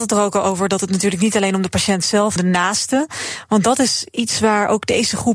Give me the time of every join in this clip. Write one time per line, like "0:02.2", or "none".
0:02.4